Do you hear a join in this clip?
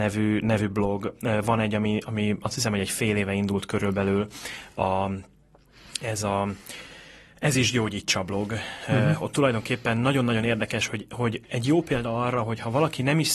no; 0 cuts

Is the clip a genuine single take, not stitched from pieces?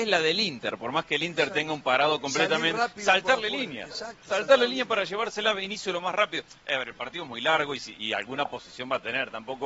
yes; 0 cuts

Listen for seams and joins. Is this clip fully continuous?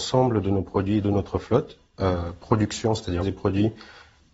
no; 2 cuts; at 1.0 s, 3.2 s

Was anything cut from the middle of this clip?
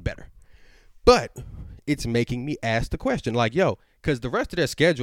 no; 0 cuts

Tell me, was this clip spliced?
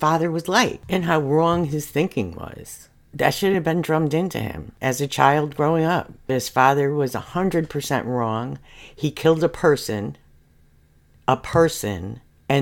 no; 0 cuts

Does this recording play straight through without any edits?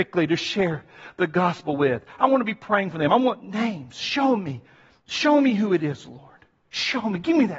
yes; 0 cuts

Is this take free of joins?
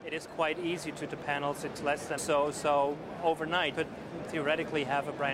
no; 4 cuts; at 1.1 s, 1.7 s, 2.2 s, 3.7 s

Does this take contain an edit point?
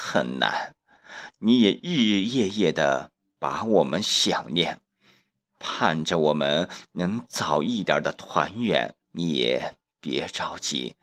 yes; 1 cut; at 9.0 s

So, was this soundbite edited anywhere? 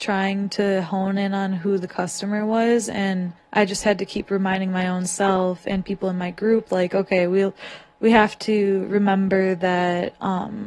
yes; 1 cut; at 3.4 s

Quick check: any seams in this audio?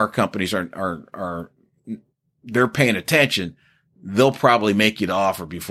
no; 0 cuts

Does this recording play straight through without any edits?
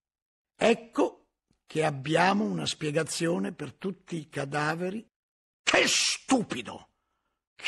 yes; 0 cuts

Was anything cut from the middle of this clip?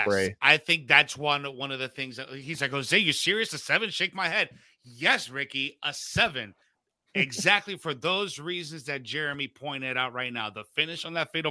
no; 0 cuts

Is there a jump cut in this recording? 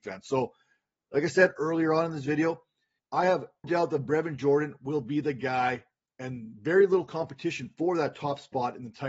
yes; 2 cuts; at 3.0 s, 3.6 s

